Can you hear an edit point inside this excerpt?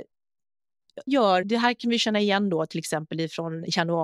yes; 2 cuts; at 1.1 s, 1.4 s

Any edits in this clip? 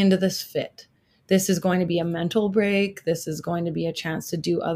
no; 0 cuts

